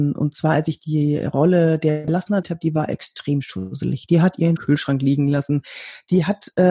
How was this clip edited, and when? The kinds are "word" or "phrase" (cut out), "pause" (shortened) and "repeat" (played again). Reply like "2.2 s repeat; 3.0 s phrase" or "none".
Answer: 2.1 s word; 2.4 s phrase; 4.6 s phrase